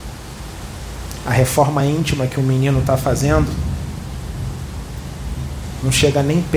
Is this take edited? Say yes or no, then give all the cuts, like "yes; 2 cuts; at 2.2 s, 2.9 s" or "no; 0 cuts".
no; 0 cuts